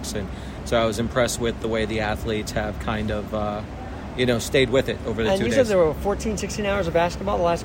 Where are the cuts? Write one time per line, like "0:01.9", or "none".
none